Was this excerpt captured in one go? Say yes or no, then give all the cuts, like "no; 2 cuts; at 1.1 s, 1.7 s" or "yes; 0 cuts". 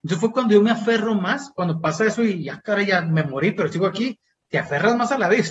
yes; 0 cuts